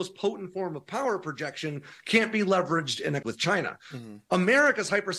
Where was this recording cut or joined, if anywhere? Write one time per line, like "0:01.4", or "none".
0:03.2